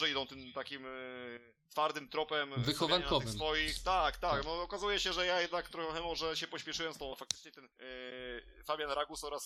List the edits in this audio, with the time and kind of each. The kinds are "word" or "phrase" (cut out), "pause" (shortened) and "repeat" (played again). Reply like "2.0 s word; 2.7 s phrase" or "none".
1.7 s pause; 7.1 s word; 7.7 s pause